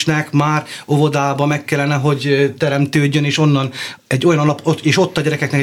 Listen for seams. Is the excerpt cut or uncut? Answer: uncut